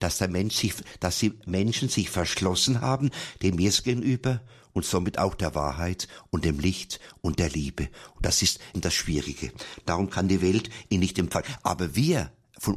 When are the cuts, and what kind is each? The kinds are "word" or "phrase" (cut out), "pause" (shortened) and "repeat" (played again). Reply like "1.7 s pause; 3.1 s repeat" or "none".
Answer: 8.7 s word